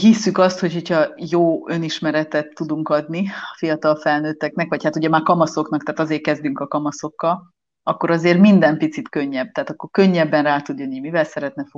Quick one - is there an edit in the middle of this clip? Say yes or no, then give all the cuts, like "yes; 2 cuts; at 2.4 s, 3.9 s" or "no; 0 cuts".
no; 0 cuts